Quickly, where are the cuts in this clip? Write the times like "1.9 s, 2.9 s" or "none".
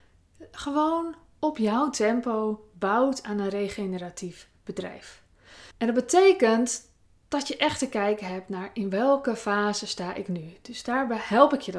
5.7 s